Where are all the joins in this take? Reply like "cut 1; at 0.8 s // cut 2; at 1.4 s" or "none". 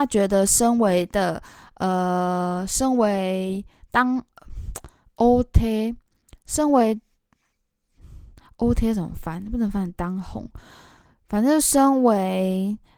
none